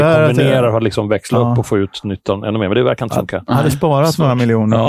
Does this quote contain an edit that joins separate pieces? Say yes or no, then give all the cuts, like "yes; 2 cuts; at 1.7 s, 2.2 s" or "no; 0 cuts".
no; 0 cuts